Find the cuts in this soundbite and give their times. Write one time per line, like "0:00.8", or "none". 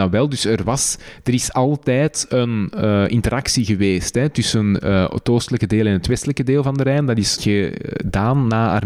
0:07.4